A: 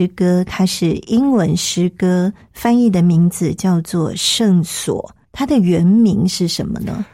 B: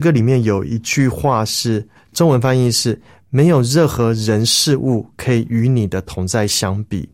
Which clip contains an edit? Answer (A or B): A